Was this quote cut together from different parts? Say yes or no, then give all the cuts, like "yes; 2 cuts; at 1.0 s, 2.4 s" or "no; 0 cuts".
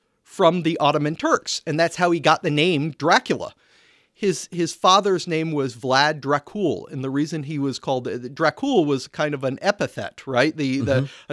no; 0 cuts